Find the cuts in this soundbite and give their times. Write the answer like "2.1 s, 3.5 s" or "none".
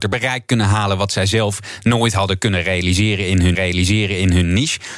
3.5 s